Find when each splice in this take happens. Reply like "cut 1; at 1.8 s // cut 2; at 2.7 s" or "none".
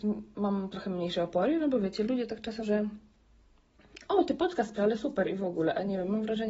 cut 1; at 2.6 s // cut 2; at 4.8 s